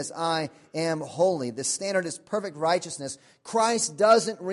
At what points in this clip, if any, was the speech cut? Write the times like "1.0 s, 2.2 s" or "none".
none

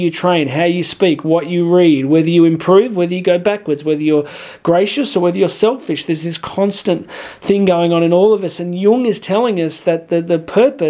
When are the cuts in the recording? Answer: none

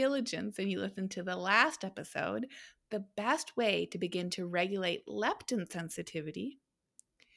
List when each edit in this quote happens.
none

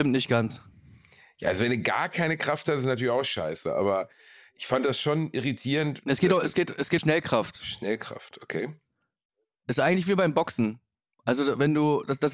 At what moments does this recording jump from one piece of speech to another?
7.0 s

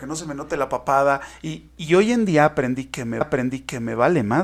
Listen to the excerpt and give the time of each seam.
3.2 s

